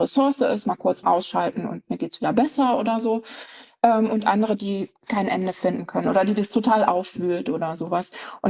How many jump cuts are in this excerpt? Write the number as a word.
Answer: two